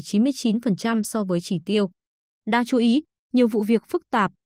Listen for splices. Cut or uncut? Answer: uncut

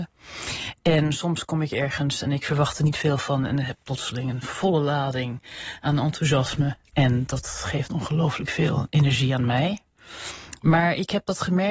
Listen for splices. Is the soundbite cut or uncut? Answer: uncut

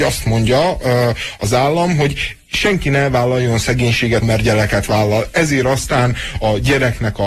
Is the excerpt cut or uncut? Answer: cut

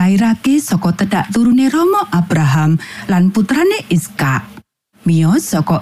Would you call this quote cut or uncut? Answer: uncut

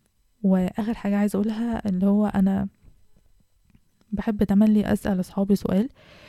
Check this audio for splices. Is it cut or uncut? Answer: uncut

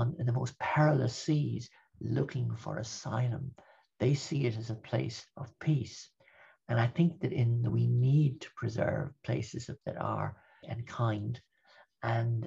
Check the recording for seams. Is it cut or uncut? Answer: cut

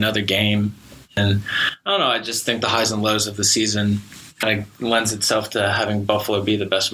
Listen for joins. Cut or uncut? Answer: uncut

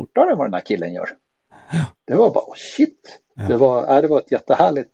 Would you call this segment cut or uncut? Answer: cut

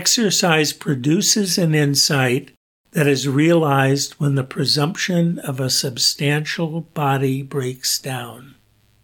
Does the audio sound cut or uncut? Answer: uncut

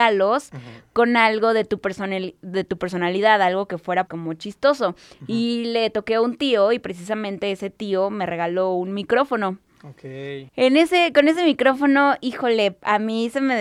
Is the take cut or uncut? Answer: cut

